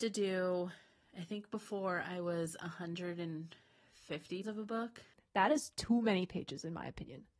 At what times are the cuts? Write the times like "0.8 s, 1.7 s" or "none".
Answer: 4.4 s